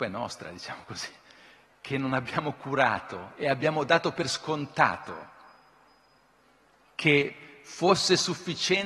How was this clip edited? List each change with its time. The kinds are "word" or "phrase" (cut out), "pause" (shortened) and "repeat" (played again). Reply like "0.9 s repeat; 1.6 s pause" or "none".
none